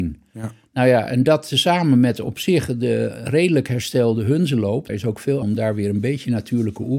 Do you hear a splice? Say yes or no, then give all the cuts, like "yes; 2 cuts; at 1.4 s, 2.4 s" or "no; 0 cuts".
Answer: yes; 2 cuts; at 4.9 s, 5.4 s